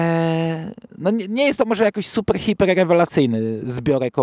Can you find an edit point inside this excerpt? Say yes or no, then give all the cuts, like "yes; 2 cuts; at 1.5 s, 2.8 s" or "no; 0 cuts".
no; 0 cuts